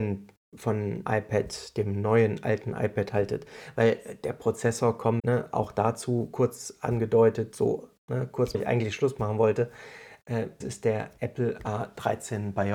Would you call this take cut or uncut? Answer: cut